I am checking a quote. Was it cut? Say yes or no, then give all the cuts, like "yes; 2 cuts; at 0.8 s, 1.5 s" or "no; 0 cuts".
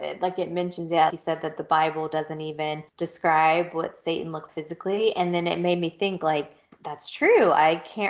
yes; 4 cuts; at 1.1 s, 2.9 s, 4.5 s, 6.7 s